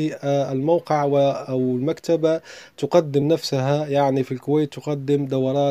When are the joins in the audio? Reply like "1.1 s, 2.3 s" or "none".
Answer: none